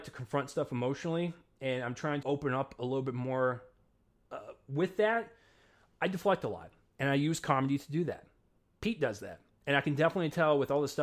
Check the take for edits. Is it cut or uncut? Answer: cut